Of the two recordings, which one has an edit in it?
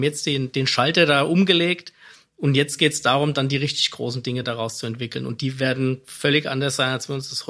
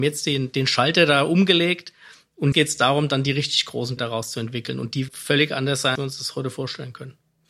second; 4 cuts; at 2.5 s, 4.0 s, 5.1 s, 6.0 s

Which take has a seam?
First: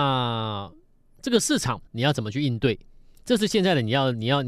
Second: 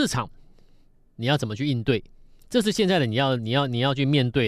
first; 1 cut; at 1.9 s

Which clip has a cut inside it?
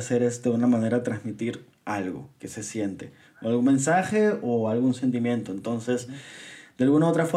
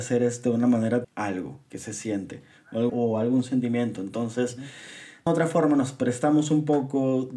second; 3 cuts; at 1.0 s, 2.9 s, 5.3 s

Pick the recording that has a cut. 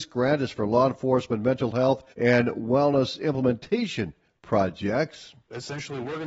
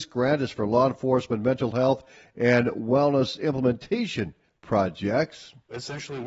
first; 1 cut; at 2.1 s

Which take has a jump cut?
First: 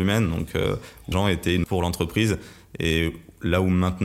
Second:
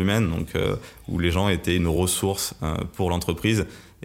first; 2 cuts; at 1.1 s, 1.6 s

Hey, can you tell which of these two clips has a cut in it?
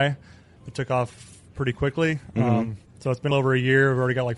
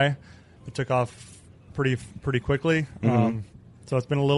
first; 3 cuts; at 1.5 s, 2.9 s, 3.3 s

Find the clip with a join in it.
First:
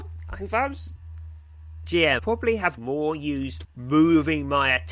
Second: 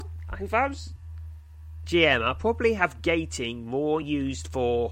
first; 3 cuts; at 2.2 s, 2.8 s, 3.6 s

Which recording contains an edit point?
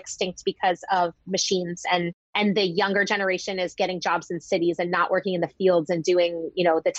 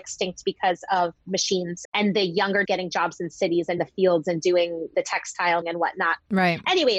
second; 5 cuts; at 1.8 s, 2.6 s, 3.8 s, 4.9 s, 5.6 s

